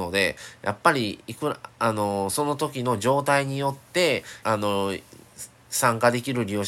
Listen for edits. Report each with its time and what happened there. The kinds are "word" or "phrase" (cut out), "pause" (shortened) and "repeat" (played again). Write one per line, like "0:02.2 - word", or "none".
0:01.7 - pause
0:04.4 - word